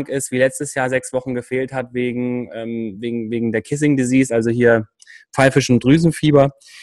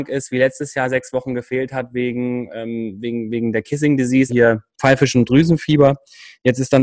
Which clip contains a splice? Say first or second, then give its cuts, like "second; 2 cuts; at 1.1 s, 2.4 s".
second; 2 cuts; at 4.3 s, 4.7 s